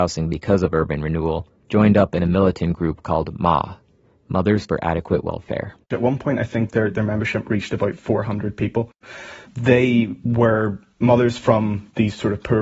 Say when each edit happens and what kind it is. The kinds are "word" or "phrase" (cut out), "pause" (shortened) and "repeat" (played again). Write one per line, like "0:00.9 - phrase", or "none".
0:01.6 - pause
0:05.8 - pause